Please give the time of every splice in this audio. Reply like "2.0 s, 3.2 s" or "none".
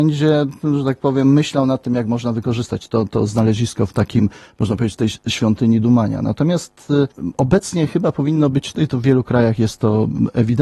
none